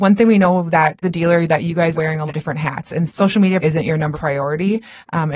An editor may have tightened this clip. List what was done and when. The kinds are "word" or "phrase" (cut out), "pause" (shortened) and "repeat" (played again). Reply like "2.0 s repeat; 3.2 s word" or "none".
1.0 s word; 1.9 s word; 2.3 s word; 3.1 s word; 3.6 s word; 4.1 s word

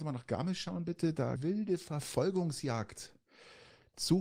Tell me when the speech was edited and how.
1.4 s phrase

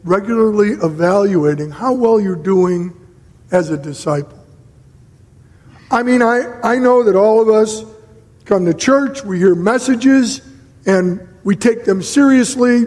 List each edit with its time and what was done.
none

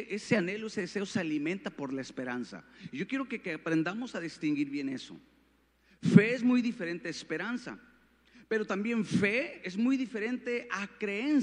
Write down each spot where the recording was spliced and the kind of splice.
none

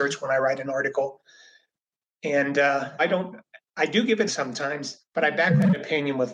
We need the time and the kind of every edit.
3.0 s word; 4.3 s word; 5.1 s pause

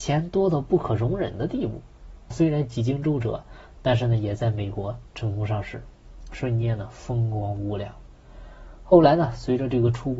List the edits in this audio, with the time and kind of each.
2.3 s word

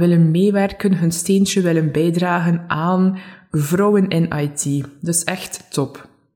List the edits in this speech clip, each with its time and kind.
none

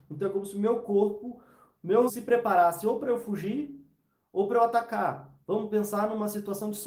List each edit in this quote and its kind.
2.1 s word

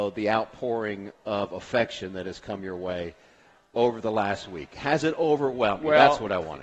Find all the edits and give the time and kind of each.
none

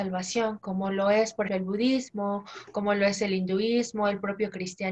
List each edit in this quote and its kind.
1.5 s word

